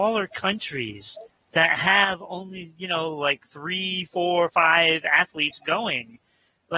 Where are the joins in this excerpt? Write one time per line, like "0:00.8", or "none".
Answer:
0:01.3